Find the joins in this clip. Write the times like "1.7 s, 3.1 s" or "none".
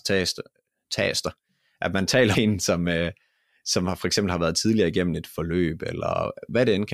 2.3 s